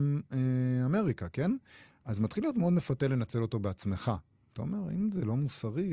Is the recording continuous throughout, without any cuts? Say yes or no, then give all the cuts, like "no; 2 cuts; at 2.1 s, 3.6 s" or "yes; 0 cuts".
yes; 0 cuts